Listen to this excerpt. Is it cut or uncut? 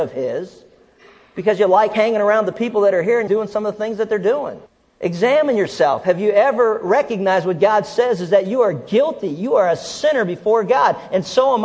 cut